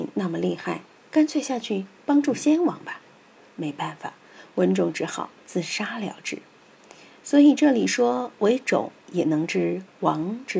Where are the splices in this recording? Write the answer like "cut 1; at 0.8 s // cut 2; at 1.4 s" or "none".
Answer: none